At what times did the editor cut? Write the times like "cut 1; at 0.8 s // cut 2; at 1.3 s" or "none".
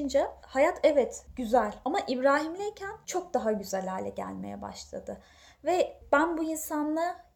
none